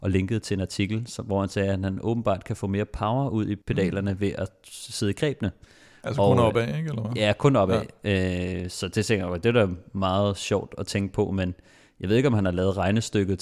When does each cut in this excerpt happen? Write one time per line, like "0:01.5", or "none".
0:03.6